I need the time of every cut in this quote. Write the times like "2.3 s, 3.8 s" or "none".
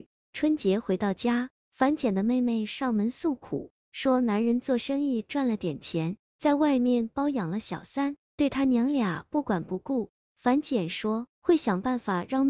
11.3 s